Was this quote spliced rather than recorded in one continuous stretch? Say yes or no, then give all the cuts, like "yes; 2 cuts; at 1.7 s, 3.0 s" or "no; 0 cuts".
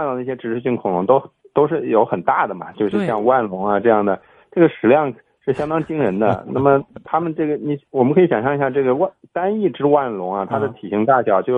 no; 0 cuts